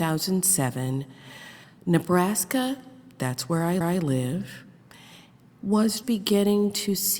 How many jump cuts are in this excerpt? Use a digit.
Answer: 3